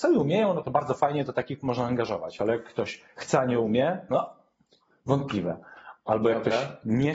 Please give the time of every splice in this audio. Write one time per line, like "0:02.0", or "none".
none